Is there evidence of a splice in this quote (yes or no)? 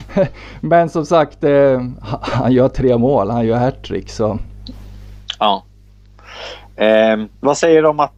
no